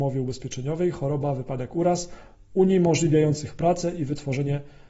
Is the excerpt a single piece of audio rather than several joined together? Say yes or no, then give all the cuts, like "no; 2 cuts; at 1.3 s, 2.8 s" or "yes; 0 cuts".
yes; 0 cuts